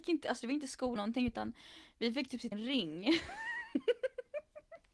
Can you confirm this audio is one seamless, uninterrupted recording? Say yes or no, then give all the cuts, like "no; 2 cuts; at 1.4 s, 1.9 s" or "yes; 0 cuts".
no; 2 cuts; at 1.0 s, 2.5 s